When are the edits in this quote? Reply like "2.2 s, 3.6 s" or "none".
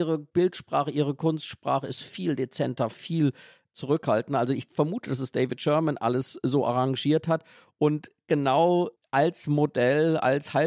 none